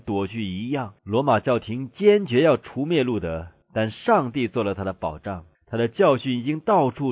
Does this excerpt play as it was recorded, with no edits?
no; 3 cuts; at 1.0 s, 3.6 s, 5.5 s

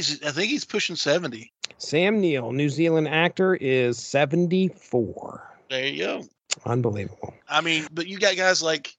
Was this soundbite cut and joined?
yes; 3 cuts; at 1.7 s, 7.4 s, 7.9 s

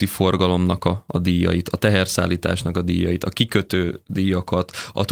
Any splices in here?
no; 0 cuts

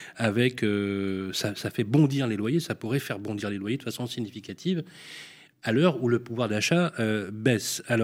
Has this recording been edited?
no; 0 cuts

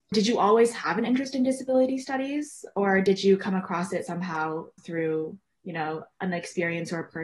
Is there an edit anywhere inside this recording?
no; 0 cuts

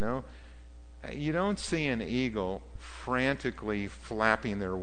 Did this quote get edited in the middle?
no; 0 cuts

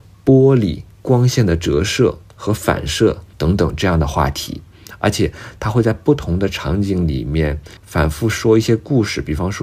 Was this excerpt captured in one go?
no; 3 cuts; at 0.9 s, 3.3 s, 7.8 s

